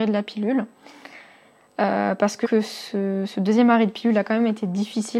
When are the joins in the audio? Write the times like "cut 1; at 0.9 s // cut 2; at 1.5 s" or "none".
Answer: cut 1; at 2.4 s

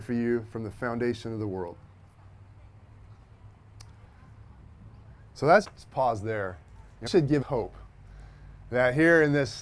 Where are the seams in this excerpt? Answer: cut 1; at 5.6 s // cut 2; at 7.1 s // cut 3; at 7.4 s

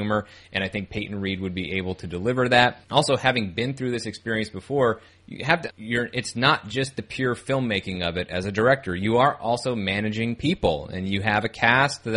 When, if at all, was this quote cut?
cut 1; at 2.8 s // cut 2; at 5.1 s // cut 3; at 5.7 s

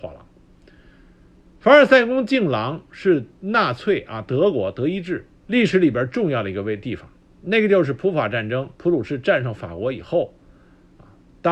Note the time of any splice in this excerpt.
cut 1; at 3.3 s // cut 2; at 5.4 s // cut 3; at 8.7 s

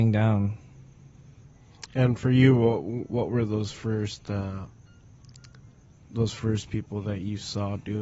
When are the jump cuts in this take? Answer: none

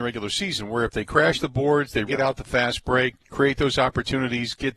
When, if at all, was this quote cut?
cut 1; at 2.1 s // cut 2; at 3.2 s

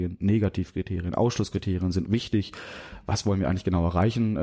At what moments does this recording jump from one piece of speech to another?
cut 1; at 2.0 s

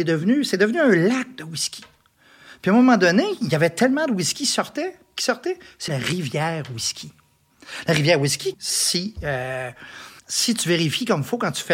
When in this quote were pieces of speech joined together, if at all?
cut 1; at 5.9 s // cut 2; at 8.5 s // cut 3; at 10.2 s

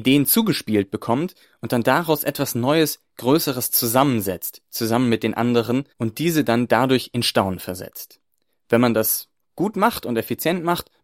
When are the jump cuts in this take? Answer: cut 1; at 5.9 s

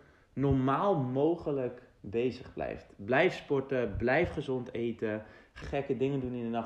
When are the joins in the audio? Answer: cut 1; at 5.6 s

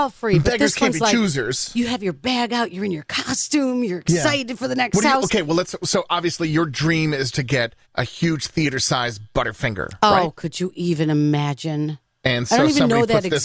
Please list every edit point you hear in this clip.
cut 1; at 7.3 s // cut 2; at 7.8 s

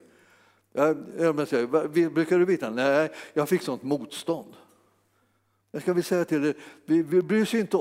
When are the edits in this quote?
none

